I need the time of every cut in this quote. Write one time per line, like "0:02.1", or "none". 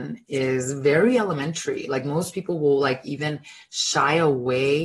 none